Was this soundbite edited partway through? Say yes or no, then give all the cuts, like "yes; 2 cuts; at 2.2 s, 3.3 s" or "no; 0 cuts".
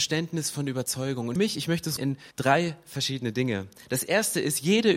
yes; 3 cuts; at 1.4 s, 2.0 s, 2.3 s